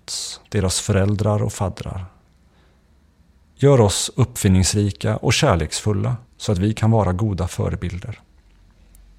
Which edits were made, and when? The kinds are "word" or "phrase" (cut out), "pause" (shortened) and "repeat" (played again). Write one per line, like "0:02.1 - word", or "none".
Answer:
0:06.3 - pause